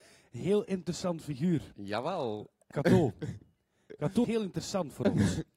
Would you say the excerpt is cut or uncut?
cut